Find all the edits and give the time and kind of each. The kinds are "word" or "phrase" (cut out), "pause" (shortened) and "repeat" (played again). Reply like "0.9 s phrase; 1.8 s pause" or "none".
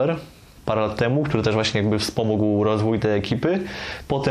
none